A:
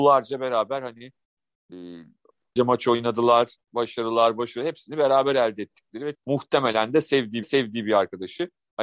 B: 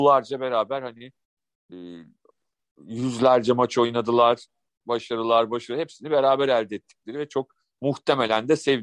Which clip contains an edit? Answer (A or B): A